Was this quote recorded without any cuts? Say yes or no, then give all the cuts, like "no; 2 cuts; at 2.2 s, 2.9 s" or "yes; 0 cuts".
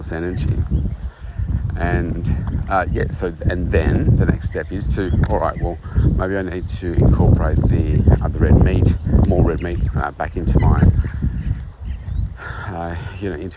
yes; 0 cuts